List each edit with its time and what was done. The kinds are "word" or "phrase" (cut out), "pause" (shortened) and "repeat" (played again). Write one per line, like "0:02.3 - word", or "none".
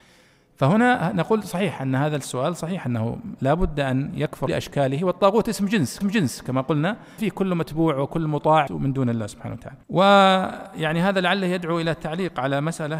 0:04.5 - phrase
0:06.0 - repeat
0:07.2 - word
0:08.7 - word
0:09.8 - pause